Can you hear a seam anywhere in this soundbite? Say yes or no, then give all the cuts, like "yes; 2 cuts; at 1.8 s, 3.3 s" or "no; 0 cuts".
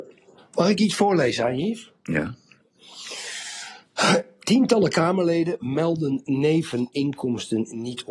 no; 0 cuts